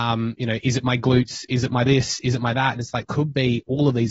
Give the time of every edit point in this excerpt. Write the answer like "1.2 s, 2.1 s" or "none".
3.0 s